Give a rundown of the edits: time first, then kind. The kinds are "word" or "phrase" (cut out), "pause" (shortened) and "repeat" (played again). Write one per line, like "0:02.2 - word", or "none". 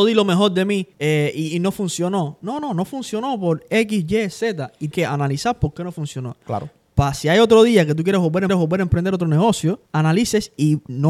0:00.9 - pause
0:04.9 - word
0:08.5 - repeat
0:09.9 - pause